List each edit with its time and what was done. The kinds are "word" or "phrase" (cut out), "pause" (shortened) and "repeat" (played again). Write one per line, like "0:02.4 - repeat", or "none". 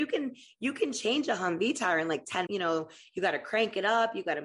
0:02.5 - phrase